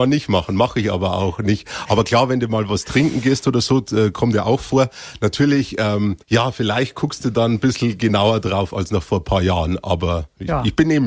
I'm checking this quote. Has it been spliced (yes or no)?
yes